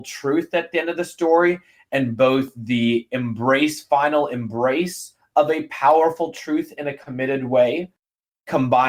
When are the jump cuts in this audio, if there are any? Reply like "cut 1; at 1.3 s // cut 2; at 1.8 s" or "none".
none